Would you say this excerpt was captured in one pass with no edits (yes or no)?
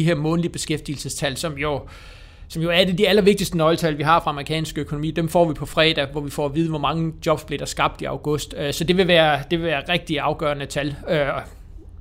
yes